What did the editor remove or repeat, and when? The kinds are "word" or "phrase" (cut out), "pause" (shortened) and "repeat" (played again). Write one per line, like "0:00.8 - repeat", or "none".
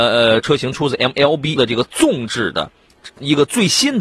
0:01.6 - word